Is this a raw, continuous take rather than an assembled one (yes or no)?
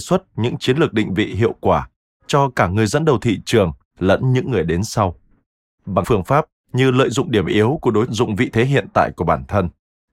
no